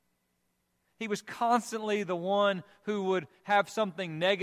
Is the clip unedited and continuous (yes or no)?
yes